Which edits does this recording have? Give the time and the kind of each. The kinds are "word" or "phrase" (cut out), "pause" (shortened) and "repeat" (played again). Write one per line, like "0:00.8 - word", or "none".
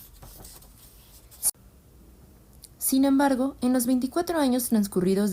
none